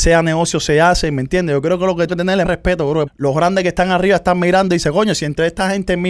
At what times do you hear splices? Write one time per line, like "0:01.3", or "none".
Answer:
0:02.1
0:02.4
0:03.1